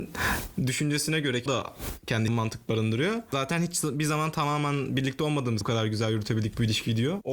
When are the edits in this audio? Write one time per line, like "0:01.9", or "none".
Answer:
0:01.5
0:02.3
0:05.6